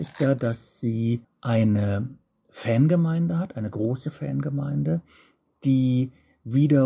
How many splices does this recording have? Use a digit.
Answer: 1